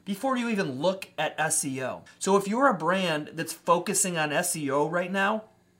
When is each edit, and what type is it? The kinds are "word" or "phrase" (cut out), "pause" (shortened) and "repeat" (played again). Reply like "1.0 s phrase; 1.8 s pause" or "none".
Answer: 2.1 s pause

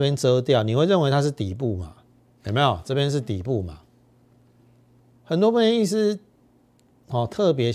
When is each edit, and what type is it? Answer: none

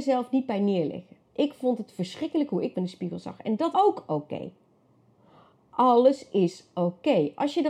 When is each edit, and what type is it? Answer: 1.3 s pause; 2.7 s word; 3.7 s word

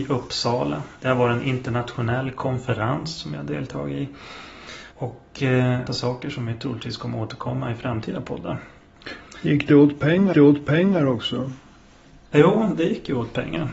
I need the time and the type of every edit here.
0.9 s pause; 4.9 s pause; 5.9 s phrase; 10.3 s repeat

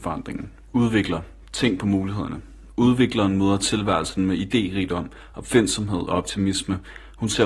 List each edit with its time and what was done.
none

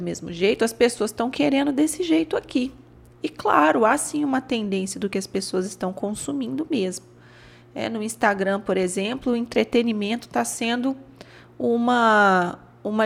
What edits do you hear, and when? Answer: none

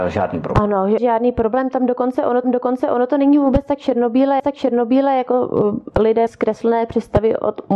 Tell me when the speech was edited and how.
1.0 s word; 2.4 s repeat; 4.4 s repeat; 6.3 s phrase

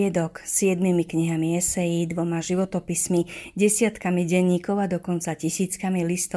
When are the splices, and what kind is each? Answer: none

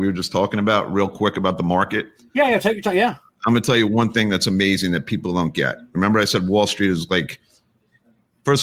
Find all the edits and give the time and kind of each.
none

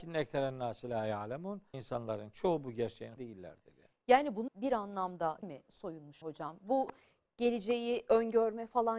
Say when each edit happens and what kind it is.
1.7 s word; 3.2 s word; 4.5 s word; 5.4 s word; 6.2 s word; 7.2 s word

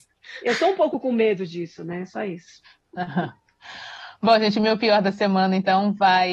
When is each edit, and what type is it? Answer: none

